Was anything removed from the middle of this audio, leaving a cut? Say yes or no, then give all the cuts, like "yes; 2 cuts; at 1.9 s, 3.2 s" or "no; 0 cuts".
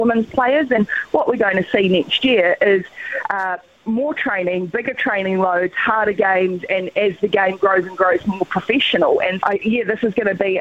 yes; 1 cut; at 9.4 s